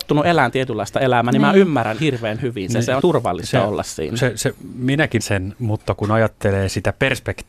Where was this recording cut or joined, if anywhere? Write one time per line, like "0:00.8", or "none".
0:02.0
0:03.0
0:05.2